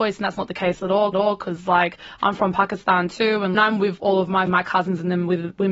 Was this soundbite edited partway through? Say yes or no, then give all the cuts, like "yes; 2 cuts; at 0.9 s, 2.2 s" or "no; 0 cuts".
yes; 3 cuts; at 1.1 s, 3.5 s, 4.5 s